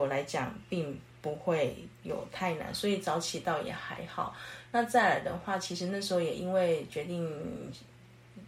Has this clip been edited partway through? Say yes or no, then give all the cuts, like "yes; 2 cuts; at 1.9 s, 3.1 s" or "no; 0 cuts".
no; 0 cuts